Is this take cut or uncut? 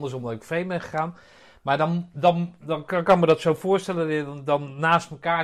uncut